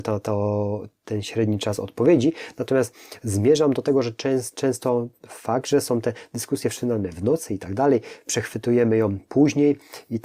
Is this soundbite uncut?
yes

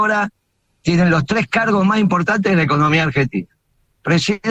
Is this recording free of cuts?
yes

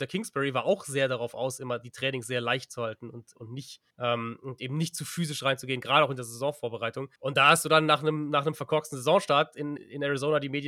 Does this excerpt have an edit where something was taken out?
yes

